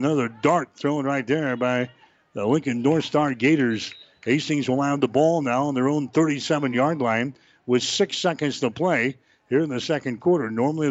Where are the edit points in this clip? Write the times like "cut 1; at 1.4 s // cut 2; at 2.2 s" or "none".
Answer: none